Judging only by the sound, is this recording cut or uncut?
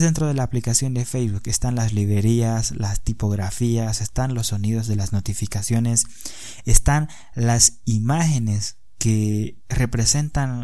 uncut